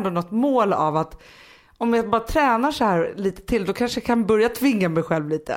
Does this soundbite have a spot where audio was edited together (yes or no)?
no